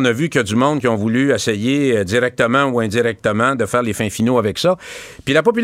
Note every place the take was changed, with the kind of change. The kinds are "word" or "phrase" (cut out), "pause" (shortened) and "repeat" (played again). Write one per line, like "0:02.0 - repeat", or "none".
none